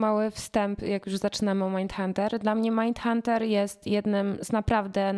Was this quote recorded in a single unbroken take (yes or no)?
yes